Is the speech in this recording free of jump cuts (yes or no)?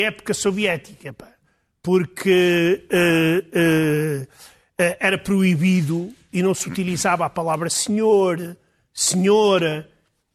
yes